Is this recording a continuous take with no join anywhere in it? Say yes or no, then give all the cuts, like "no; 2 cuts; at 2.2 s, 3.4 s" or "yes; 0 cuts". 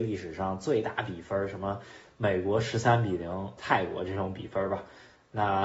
no; 1 cut; at 3.6 s